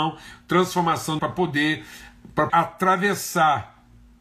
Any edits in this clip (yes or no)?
yes